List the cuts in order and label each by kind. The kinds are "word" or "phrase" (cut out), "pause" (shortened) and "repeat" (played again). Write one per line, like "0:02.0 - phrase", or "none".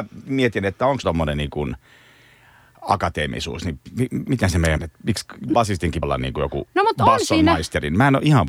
0:01.0 - word
0:04.8 - word
0:05.5 - word
0:06.0 - word